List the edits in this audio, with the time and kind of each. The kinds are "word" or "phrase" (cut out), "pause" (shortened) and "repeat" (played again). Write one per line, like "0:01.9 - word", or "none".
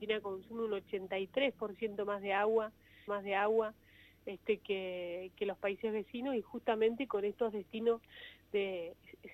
0:03.1 - repeat

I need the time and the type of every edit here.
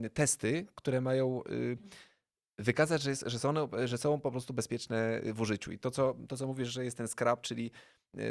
none

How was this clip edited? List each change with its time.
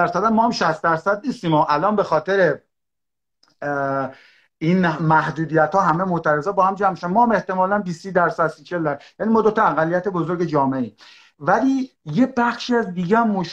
none

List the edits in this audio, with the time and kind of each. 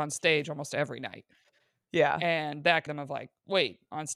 0:02.9 - word

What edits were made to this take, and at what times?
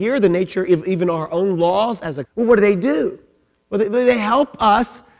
0:02.2 - word

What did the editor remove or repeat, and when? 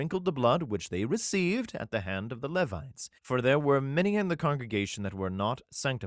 0:03.2 - pause

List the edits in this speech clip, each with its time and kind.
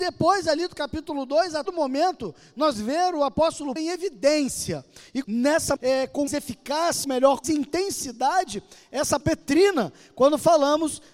0:01.7 - word
0:02.8 - word
0:03.8 - word
0:05.2 - word
0:05.8 - word
0:06.3 - word
0:07.0 - word
0:07.4 - word
0:09.2 - word

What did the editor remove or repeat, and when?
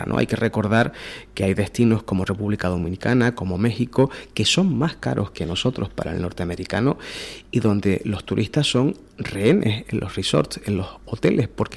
none

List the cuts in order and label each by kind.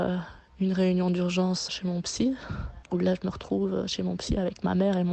0:01.7 - word
0:02.8 - pause

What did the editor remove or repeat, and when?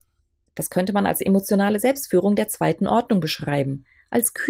none

